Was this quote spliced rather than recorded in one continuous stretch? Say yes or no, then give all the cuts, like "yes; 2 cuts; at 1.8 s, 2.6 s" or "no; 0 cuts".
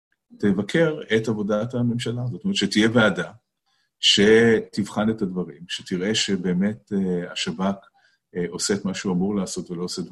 no; 0 cuts